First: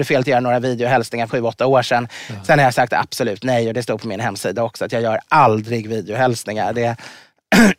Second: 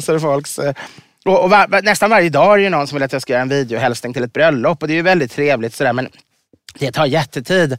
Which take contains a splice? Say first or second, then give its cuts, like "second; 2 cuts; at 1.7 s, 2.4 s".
first; 1 cut; at 1.3 s